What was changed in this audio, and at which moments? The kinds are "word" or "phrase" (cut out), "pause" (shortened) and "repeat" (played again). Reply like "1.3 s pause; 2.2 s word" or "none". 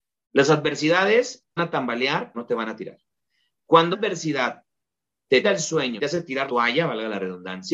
1.6 s word; 2.3 s word; 3.9 s word; 5.4 s word; 6.0 s word; 6.5 s word